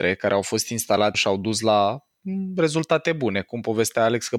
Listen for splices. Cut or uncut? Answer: cut